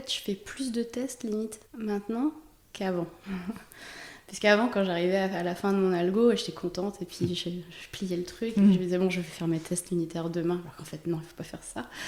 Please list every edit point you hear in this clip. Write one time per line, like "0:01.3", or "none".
0:01.7